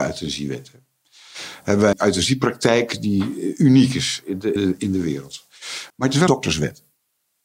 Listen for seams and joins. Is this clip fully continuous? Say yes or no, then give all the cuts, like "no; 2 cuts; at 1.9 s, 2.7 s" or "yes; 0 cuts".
no; 4 cuts; at 1.9 s, 4.6 s, 5.9 s, 6.3 s